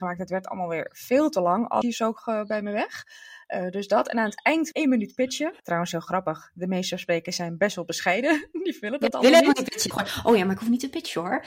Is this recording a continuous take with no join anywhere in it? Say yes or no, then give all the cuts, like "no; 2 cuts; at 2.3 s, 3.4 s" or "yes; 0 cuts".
no; 4 cuts; at 1.8 s, 4.7 s, 5.6 s, 9.9 s